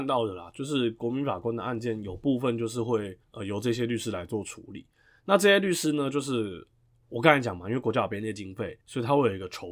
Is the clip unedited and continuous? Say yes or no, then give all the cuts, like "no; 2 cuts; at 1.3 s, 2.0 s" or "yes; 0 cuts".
no; 2 cuts; at 3.2 s, 8.8 s